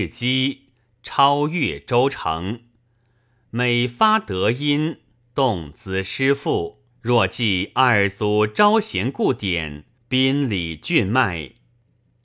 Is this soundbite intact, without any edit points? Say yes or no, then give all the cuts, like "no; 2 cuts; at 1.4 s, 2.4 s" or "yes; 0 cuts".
no; 2 cuts; at 6.9 s, 10.0 s